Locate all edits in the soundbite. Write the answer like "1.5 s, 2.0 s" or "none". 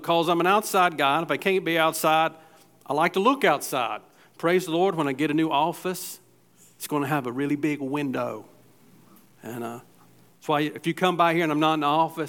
none